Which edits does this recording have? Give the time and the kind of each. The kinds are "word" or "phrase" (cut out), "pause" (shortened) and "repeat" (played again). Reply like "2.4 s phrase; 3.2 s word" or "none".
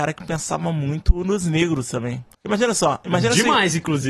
2.3 s pause